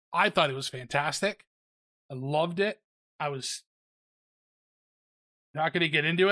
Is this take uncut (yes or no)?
yes